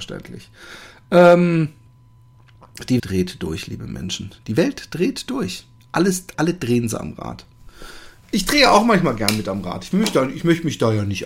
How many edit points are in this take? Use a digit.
2